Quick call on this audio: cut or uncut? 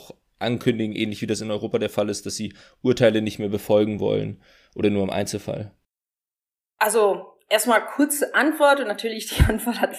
uncut